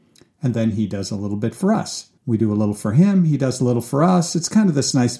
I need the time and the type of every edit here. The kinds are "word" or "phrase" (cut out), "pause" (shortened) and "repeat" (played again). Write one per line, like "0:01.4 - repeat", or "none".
0:02.2 - pause